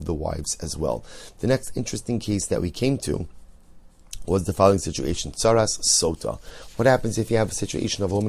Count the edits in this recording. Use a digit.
0